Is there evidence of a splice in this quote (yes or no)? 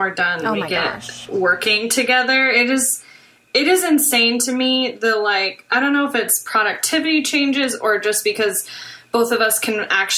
no